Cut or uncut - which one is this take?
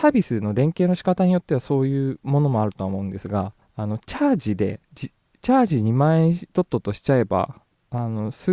cut